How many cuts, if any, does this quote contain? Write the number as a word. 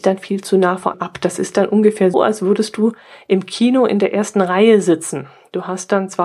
two